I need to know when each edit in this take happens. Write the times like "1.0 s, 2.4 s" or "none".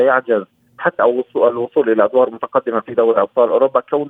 1.0 s